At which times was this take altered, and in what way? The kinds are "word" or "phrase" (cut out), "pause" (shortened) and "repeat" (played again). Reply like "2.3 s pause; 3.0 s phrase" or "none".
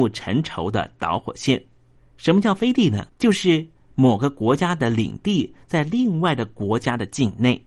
2.0 s pause; 3.1 s pause

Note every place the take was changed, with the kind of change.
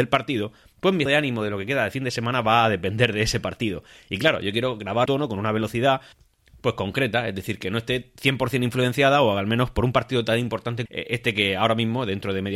1.1 s word; 5.1 s phrase; 10.9 s phrase

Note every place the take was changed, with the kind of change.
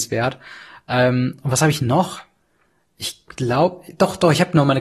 none

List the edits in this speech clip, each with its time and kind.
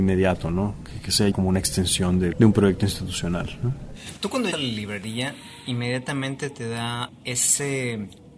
1.3 s word; 2.3 s word; 4.5 s word; 7.1 s word

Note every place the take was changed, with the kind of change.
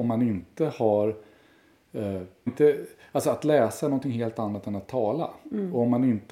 2.5 s phrase

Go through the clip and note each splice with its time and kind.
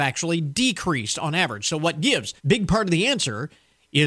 2.4 s pause

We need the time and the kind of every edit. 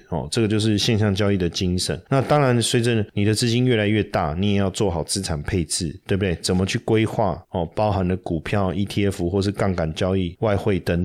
none

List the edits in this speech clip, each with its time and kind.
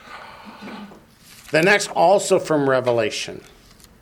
1.9 s phrase

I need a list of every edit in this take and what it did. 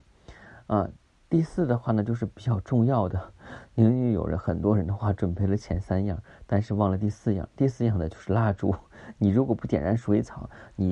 none

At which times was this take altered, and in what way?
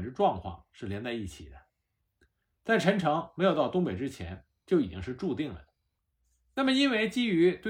none

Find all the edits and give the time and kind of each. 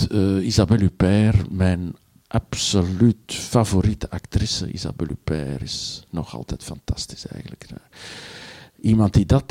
none

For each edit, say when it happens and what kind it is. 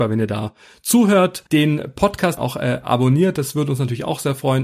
1.5 s pause; 2.4 s word

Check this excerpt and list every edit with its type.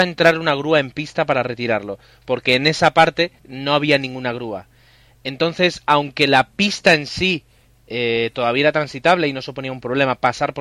3.4 s pause

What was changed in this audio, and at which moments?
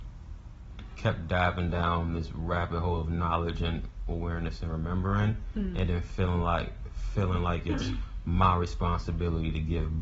none

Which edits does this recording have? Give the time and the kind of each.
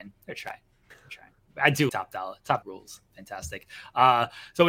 1.9 s word; 2.6 s word

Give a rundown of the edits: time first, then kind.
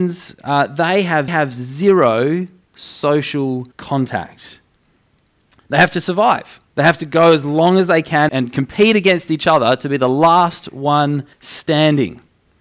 1.3 s repeat; 3.7 s pause; 6.7 s pause; 8.3 s word; 11.3 s pause

